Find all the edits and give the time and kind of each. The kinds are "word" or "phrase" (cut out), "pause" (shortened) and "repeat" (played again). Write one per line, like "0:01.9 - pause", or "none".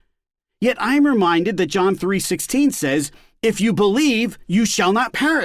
none